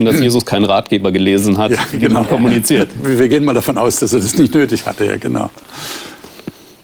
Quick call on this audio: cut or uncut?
uncut